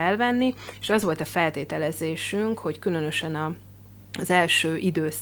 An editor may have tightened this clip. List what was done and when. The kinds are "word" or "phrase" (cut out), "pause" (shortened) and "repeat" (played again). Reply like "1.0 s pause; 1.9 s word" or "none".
none

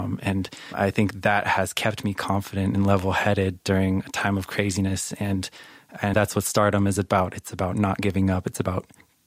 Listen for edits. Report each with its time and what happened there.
6.1 s word

